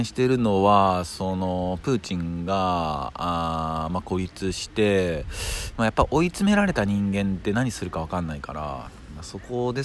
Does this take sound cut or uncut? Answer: uncut